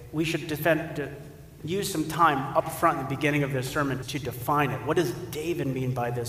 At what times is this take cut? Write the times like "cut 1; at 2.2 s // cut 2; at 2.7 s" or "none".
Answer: cut 1; at 1.6 s // cut 2; at 4.0 s